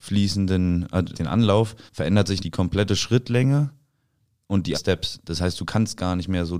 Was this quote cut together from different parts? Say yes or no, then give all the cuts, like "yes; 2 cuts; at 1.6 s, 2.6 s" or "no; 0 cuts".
yes; 4 cuts; at 1.1 s, 1.9 s, 2.4 s, 4.7 s